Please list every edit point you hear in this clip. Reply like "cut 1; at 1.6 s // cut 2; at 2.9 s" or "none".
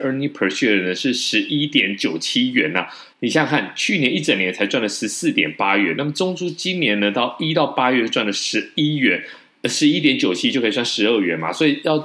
cut 1; at 3.1 s